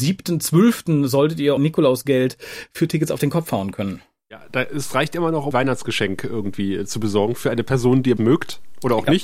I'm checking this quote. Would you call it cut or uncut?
cut